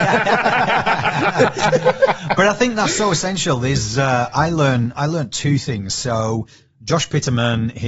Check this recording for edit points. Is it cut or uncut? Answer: uncut